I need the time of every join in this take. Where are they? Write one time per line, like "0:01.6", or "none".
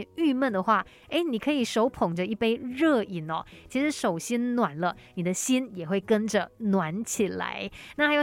none